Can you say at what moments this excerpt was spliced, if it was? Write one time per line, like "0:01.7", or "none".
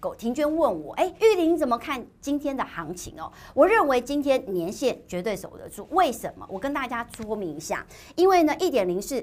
0:01.2